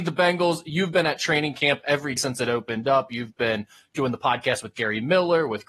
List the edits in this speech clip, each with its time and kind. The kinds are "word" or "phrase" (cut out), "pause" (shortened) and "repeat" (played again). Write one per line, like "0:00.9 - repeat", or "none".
0:02.2 - word